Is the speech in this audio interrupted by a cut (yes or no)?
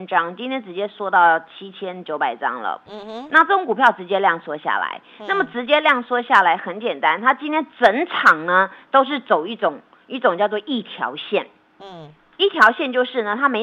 no